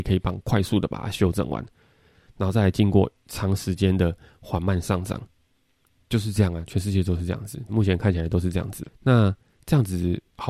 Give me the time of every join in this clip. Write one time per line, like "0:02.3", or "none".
0:07.7
0:08.8